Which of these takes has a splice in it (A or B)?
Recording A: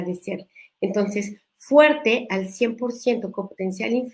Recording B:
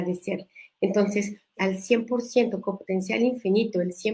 B